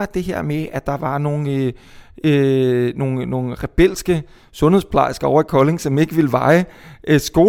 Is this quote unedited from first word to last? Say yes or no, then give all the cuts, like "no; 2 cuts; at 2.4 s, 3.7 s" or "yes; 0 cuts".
yes; 0 cuts